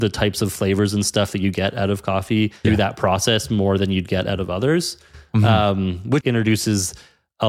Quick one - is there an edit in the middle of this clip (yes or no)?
yes